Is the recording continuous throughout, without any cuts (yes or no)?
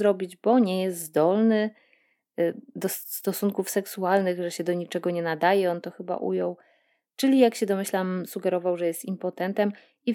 yes